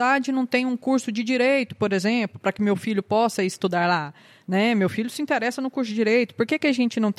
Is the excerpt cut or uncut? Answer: uncut